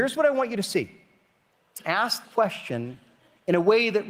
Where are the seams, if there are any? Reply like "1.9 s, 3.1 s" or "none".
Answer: 1.8 s, 2.2 s

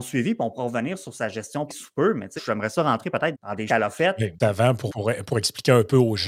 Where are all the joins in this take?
1.7 s, 2.4 s, 3.3 s, 3.7 s, 4.4 s, 4.9 s

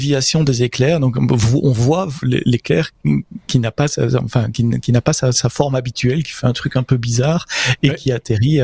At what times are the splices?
2.2 s

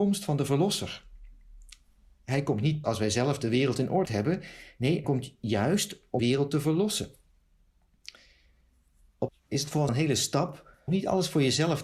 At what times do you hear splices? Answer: 2.8 s, 4.1 s, 5.0 s, 6.2 s, 9.3 s, 9.9 s, 10.9 s

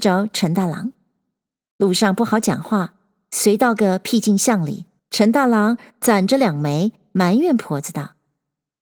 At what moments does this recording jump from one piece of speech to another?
5.0 s

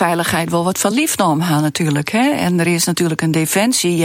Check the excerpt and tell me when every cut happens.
none

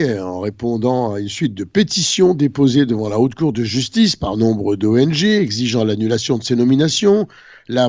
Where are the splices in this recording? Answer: none

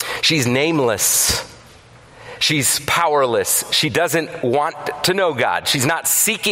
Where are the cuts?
none

